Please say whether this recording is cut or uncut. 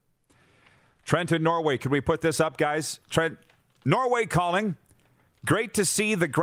uncut